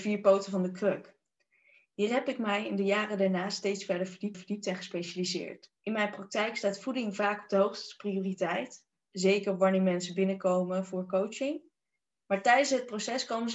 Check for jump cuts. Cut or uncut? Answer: cut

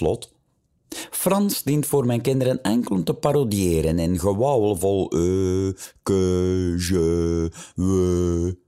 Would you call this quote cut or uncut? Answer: uncut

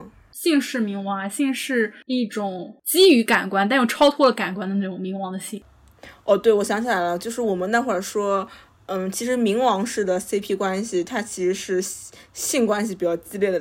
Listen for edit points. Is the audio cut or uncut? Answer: uncut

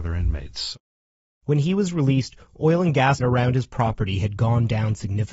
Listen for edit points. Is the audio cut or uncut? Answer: cut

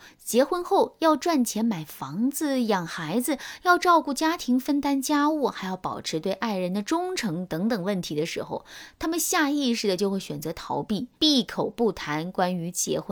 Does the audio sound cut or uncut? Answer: cut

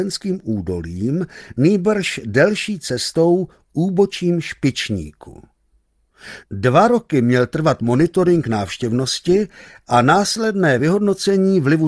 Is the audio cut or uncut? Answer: uncut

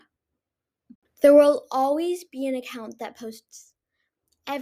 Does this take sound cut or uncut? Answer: cut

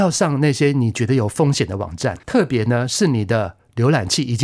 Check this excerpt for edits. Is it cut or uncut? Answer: cut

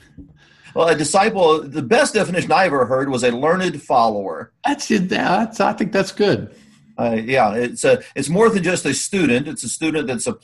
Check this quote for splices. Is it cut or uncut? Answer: uncut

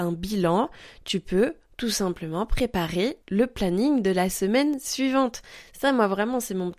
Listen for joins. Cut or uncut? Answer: cut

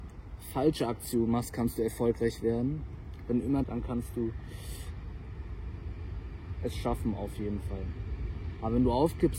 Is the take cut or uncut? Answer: cut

